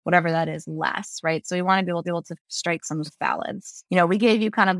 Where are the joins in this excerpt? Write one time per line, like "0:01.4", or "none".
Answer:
0:02.0
0:03.1

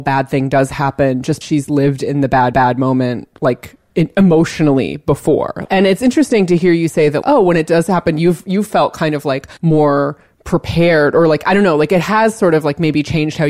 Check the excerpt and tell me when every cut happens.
0:01.4
0:02.5
0:05.6
0:07.2
0:09.6

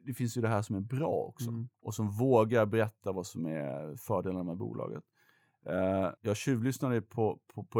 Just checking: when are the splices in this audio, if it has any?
0:01.7
0:06.2

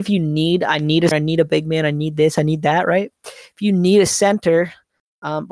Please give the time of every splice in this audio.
0:01.1

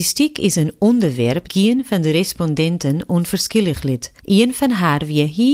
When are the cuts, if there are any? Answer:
0:01.5
0:04.2

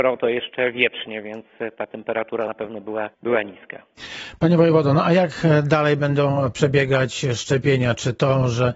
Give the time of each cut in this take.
0:02.5
0:03.1

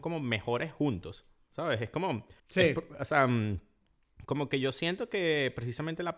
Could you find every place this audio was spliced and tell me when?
0:02.4

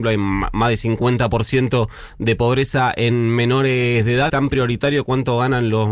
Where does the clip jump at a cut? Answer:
0:04.3

